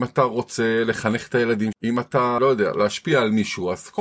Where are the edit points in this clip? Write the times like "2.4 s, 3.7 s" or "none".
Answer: 1.7 s, 2.4 s